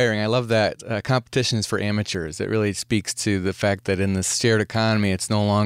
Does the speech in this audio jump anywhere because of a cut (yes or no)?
no